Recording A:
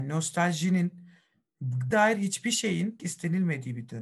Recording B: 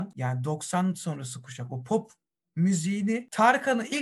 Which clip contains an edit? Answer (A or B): A